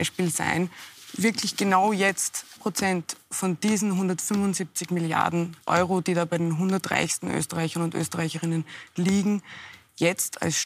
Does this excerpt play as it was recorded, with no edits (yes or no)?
no